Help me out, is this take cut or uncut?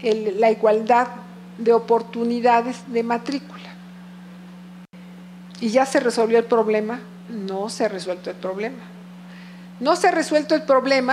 uncut